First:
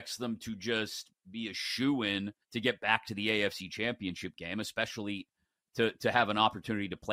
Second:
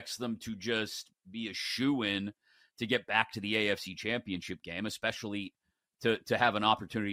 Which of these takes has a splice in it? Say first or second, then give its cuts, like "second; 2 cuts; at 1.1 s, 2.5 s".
first; 1 cut; at 2.4 s